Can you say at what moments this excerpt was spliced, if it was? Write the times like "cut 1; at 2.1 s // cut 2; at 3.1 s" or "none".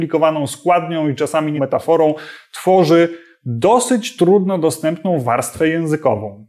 cut 1; at 1.6 s

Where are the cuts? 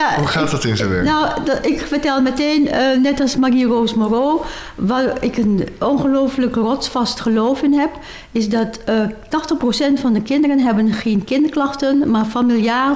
none

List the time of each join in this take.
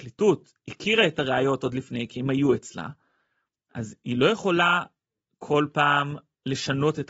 none

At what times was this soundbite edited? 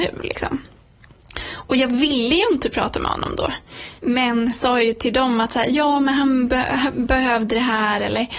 cut 1; at 4.0 s

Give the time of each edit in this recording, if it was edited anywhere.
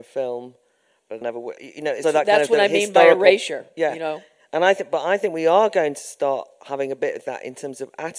cut 1; at 1.2 s // cut 2; at 1.6 s // cut 3; at 2.0 s

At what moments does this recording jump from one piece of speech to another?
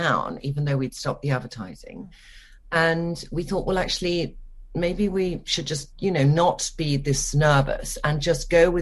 none

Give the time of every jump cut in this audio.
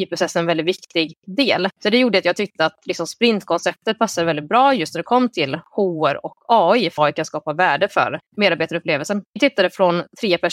cut 1; at 1.7 s // cut 2; at 7.0 s // cut 3; at 8.2 s

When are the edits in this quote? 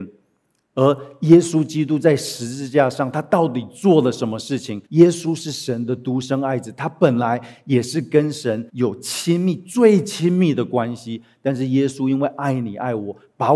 cut 1; at 4.9 s // cut 2; at 8.7 s

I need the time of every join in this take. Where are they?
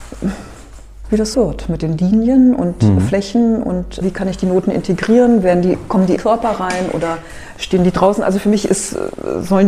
cut 1; at 1.3 s // cut 2; at 4.0 s // cut 3; at 6.2 s

